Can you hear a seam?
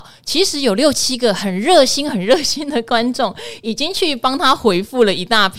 no; 0 cuts

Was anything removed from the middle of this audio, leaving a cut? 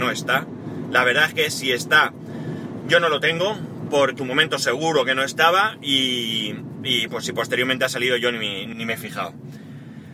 yes; 3 cuts; at 4.2 s, 7.1 s, 8.7 s

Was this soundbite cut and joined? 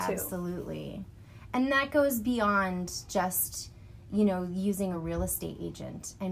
no; 0 cuts

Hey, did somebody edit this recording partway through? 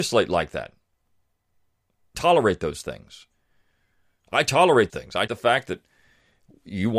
yes; 3 cuts; at 2.1 s, 4.9 s, 5.3 s

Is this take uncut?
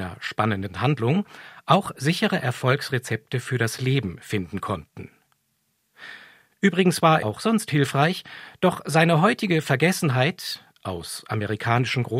no; 1 cut; at 7.2 s

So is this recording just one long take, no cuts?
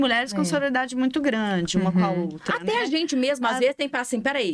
yes; 0 cuts

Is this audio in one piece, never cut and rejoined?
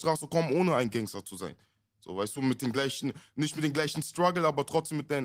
yes; 0 cuts

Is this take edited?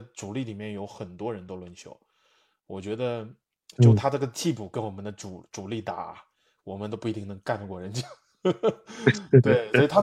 no; 0 cuts

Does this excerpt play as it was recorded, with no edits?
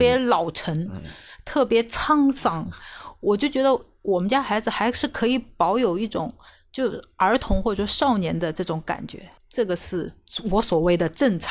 no; 2 cuts; at 6.5 s, 9.4 s

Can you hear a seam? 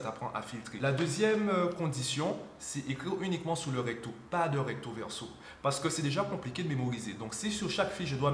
no; 0 cuts

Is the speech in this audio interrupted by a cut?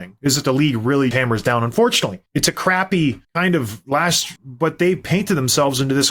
yes; 4 cuts; at 1.1 s, 2.3 s, 3.2 s, 4.4 s

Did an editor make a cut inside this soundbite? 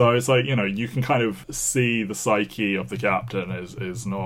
no; 0 cuts

